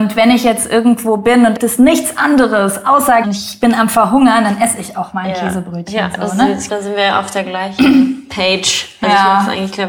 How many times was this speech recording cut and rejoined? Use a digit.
3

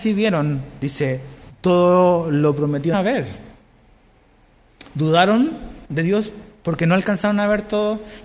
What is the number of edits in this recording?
3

